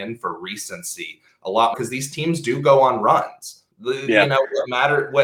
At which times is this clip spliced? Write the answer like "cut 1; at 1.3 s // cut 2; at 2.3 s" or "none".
cut 1; at 1.7 s // cut 2; at 3.7 s

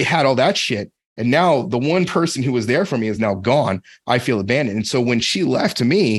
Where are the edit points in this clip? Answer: none

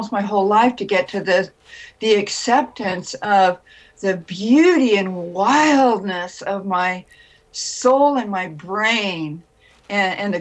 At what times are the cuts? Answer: none

